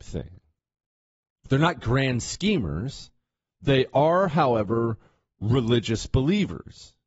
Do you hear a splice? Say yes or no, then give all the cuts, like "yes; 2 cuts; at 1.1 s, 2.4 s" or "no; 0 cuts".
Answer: no; 0 cuts